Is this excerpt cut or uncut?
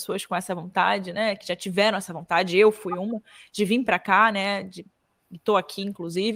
uncut